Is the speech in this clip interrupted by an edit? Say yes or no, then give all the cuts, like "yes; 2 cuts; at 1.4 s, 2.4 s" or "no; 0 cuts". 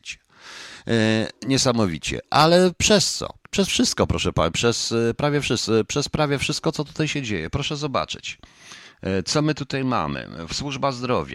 yes; 2 cuts; at 1.4 s, 3.4 s